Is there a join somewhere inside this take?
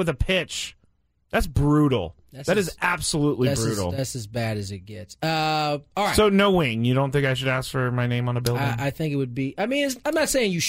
no; 0 cuts

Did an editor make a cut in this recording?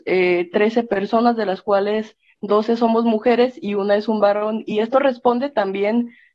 no; 0 cuts

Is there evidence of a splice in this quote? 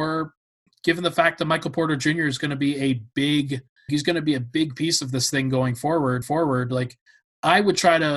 yes; 2 cuts; at 3.9 s, 6.2 s

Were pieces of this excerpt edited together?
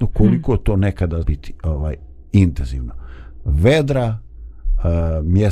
yes; 1 cut; at 1.2 s

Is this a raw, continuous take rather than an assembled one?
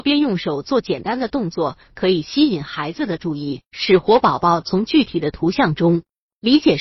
no; 1 cut; at 3.7 s

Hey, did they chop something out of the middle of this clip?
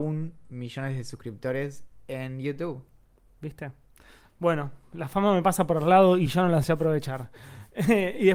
no; 0 cuts

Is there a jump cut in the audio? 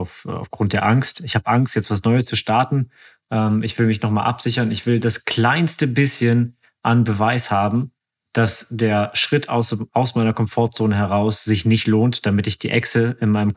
no; 0 cuts

